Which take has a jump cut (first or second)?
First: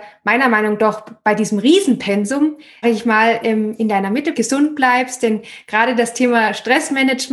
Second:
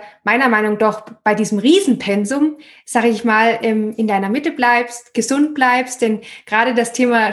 first